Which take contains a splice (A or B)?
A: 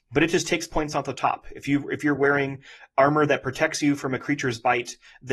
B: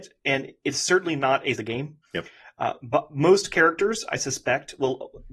B